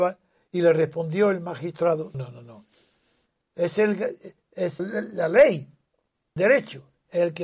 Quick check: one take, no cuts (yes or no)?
no